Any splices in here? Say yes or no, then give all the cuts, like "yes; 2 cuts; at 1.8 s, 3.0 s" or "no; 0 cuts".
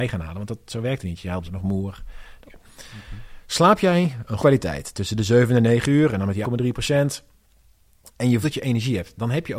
yes; 5 cuts; at 1.4 s, 2.5 s, 4.4 s, 6.4 s, 8.4 s